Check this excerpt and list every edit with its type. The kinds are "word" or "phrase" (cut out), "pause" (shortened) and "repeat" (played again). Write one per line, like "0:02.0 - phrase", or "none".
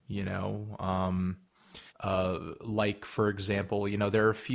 0:01.9 - pause